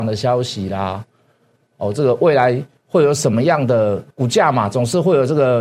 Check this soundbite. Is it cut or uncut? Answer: cut